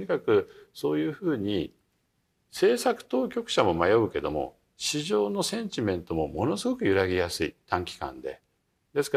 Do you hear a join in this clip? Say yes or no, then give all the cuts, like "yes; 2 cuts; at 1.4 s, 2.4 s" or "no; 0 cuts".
no; 0 cuts